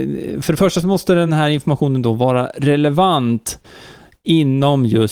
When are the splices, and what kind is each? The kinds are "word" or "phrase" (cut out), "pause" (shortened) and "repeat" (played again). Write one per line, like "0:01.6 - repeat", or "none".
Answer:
none